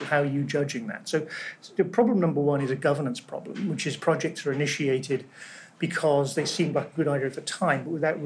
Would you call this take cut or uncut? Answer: uncut